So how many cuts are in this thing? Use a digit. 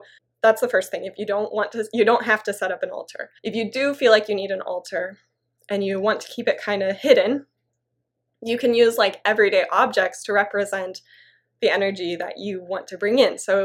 1